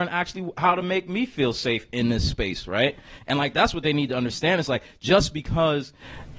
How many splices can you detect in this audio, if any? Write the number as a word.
zero